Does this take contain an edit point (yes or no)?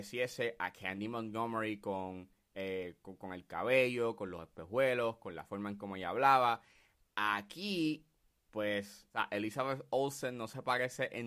no